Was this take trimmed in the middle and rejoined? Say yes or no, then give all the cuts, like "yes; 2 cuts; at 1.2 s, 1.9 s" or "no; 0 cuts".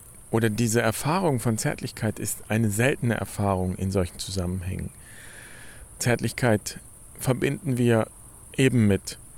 no; 0 cuts